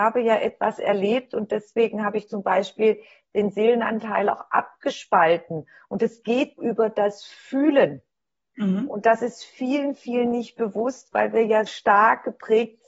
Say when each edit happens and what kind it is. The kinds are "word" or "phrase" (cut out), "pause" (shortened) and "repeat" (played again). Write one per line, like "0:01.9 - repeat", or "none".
0:06.6 - word
0:11.7 - word